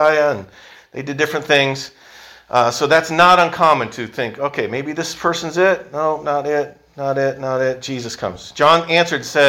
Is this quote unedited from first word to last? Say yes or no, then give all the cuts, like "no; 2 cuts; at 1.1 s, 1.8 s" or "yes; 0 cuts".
yes; 0 cuts